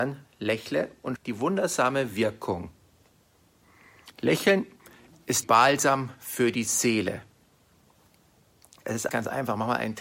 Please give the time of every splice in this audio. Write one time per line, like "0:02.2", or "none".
0:01.2
0:05.4
0:09.1